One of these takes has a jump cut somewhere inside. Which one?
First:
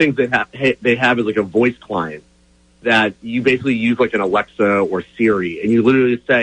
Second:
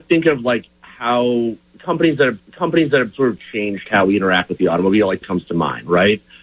second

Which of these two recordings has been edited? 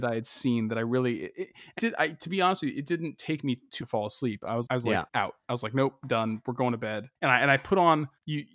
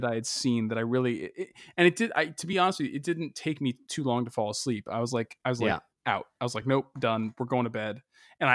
first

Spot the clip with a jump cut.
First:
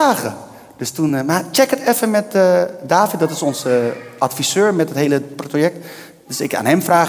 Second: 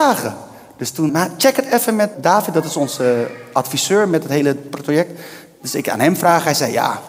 second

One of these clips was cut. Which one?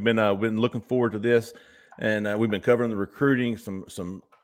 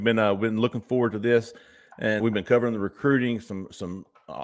second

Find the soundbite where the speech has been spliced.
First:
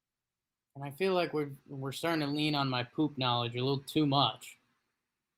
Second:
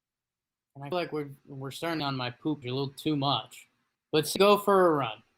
second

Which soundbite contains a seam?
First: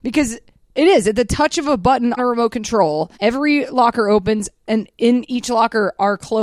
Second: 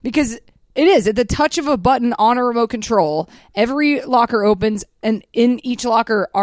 first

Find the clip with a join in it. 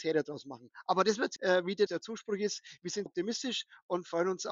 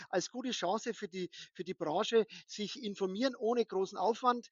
first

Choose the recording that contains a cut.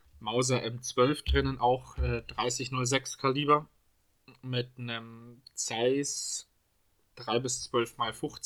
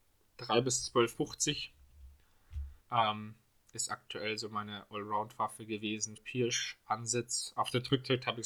second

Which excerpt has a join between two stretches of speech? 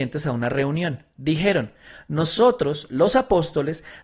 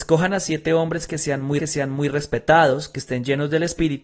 second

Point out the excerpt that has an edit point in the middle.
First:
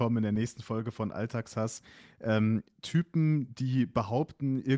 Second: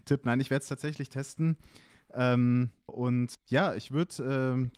second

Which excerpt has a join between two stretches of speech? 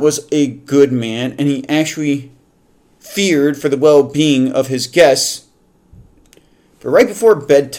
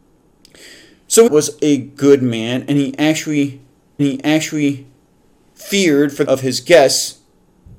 second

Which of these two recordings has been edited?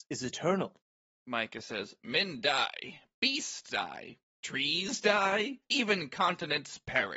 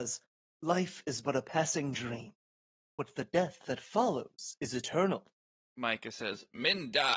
first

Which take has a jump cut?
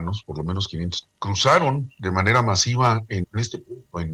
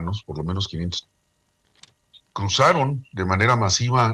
first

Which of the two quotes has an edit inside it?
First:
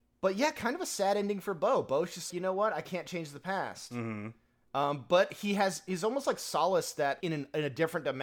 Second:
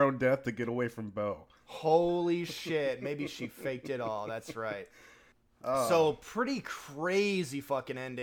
first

